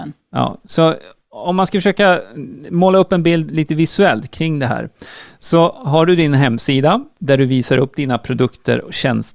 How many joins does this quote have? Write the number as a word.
zero